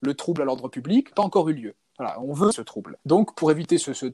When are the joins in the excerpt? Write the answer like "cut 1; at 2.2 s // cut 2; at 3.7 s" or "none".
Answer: cut 1; at 1.1 s // cut 2; at 2.5 s // cut 3; at 3.0 s